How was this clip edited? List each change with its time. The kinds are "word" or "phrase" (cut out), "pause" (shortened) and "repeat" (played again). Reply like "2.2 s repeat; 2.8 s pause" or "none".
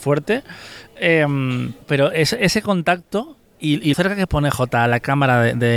1.8 s pause; 3.9 s word